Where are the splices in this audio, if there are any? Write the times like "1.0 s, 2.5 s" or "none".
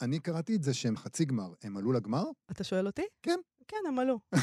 1.0 s, 2.4 s